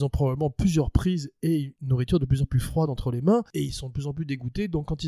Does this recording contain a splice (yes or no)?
no